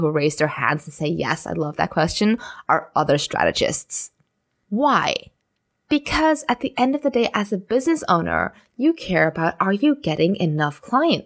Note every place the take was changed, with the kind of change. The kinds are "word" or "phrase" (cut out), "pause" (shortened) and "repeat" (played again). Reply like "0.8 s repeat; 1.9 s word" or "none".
none